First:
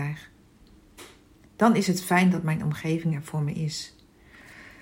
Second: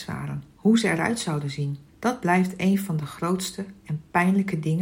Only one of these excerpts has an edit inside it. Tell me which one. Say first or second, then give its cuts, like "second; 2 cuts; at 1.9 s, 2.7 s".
second; 1 cut; at 1.9 s